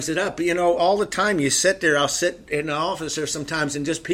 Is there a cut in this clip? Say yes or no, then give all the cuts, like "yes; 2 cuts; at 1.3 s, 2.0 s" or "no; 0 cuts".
no; 0 cuts